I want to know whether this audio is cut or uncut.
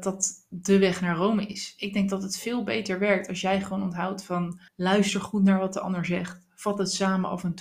cut